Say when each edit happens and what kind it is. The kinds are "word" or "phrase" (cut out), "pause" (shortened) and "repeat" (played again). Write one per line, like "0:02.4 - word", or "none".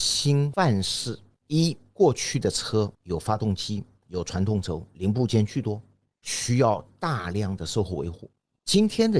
0:02.9 - pause